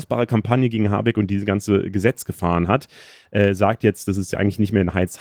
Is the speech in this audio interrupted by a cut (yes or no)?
no